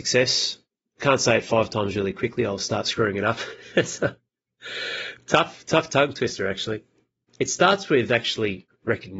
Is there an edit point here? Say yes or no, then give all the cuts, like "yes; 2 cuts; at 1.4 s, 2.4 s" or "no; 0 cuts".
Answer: no; 0 cuts